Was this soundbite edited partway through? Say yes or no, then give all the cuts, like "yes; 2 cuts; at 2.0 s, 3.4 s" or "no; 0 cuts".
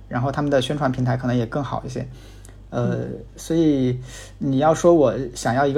no; 0 cuts